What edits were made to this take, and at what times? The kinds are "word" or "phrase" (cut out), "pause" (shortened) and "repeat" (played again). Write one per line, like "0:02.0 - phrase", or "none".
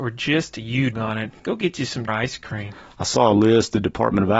0:00.9 - word
0:01.4 - pause
0:02.1 - phrase